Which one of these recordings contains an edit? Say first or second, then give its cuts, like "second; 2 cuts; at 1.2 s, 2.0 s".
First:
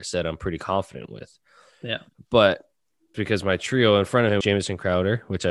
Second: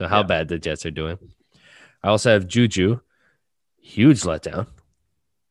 first; 2 cuts; at 3.1 s, 4.4 s